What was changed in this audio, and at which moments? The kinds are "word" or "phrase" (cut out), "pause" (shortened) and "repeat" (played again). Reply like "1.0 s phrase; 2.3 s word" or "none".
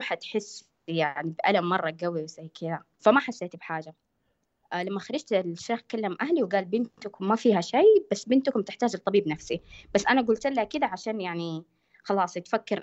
2.9 s pause